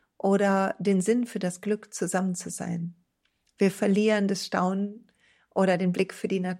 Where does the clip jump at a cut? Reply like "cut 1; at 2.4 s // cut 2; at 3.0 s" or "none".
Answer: none